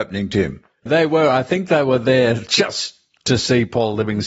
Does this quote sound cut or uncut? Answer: uncut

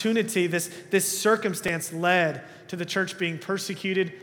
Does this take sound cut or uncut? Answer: uncut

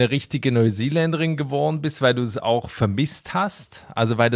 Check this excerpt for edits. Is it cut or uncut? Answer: uncut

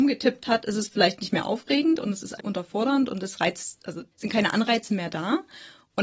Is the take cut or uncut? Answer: cut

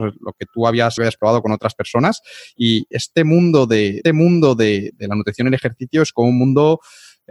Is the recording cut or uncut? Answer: cut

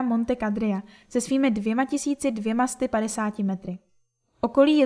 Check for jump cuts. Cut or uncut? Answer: uncut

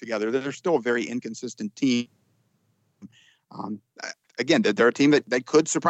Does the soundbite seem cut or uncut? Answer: uncut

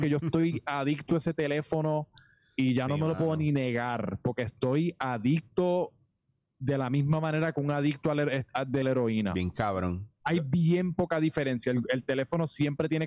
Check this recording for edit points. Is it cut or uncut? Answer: cut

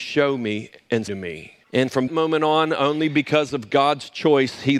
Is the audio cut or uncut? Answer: cut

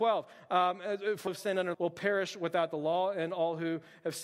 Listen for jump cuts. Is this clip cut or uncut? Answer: cut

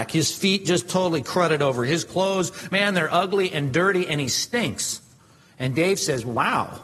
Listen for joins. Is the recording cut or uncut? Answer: uncut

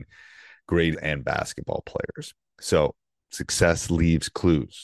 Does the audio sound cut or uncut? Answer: cut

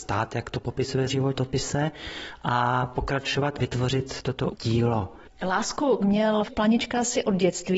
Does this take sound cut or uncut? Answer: cut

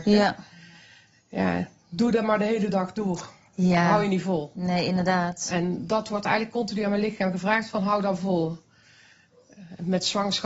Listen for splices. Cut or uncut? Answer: uncut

